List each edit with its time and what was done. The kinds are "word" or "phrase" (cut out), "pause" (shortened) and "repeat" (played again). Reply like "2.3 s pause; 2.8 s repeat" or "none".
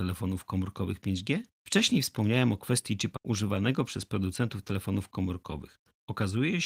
1.5 s pause; 3.2 s word